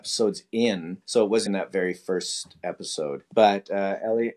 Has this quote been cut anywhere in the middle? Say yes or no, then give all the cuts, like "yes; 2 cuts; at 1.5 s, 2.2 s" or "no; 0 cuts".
yes; 3 cuts; at 1.0 s, 1.5 s, 3.3 s